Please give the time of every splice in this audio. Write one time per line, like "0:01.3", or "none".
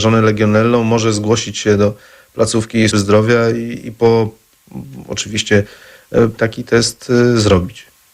0:02.9
0:06.4